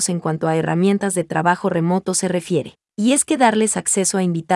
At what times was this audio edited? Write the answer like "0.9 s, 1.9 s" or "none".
2.9 s